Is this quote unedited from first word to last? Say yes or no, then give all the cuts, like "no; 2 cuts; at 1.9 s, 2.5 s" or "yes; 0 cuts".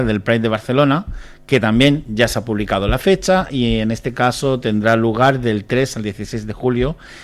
yes; 0 cuts